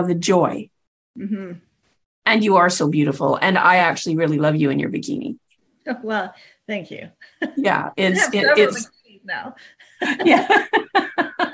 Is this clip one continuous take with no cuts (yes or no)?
yes